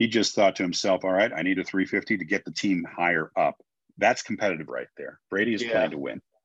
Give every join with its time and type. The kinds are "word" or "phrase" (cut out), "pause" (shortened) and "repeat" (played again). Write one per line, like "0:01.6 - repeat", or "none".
0:01.6 - phrase
0:03.8 - pause
0:04.7 - word